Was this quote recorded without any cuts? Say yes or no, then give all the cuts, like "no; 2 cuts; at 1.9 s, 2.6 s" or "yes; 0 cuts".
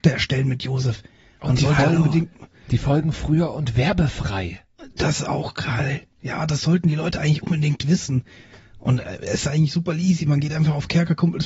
yes; 0 cuts